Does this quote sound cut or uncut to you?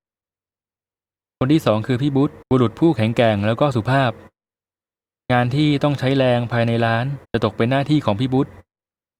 cut